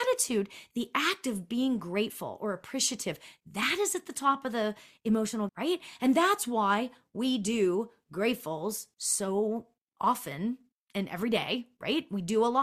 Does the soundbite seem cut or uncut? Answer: cut